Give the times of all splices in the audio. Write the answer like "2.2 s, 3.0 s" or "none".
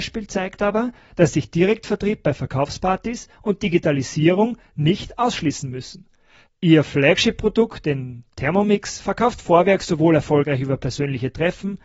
none